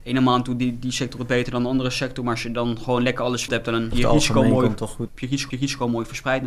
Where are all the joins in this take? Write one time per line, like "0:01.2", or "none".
0:03.5
0:03.9
0:05.1
0:05.5